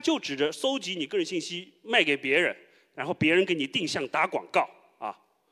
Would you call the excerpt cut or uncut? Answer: uncut